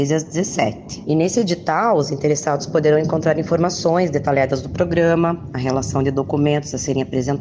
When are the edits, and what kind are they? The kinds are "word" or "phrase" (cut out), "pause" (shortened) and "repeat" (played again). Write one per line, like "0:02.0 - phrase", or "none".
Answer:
none